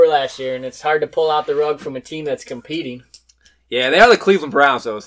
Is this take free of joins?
yes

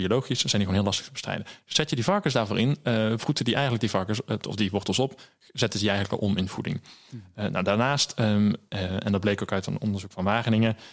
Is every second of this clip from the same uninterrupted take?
yes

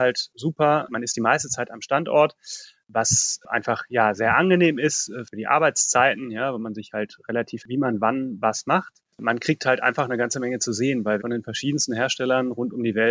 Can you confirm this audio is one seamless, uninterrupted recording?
no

